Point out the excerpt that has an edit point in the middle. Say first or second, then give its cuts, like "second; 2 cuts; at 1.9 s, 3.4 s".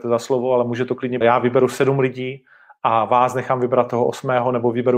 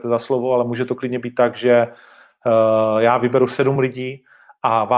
first; 1 cut; at 1.2 s